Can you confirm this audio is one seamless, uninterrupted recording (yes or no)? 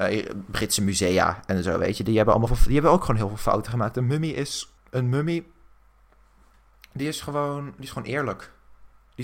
no